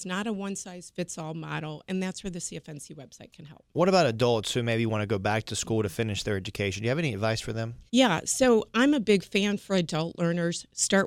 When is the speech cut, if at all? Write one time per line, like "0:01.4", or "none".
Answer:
0:07.9